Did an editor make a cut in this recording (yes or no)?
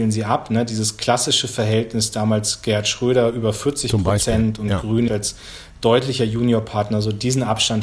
yes